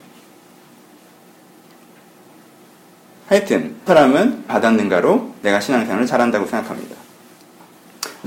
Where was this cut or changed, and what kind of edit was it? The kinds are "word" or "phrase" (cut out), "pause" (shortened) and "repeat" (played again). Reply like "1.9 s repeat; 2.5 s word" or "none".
3.9 s word; 4.5 s phrase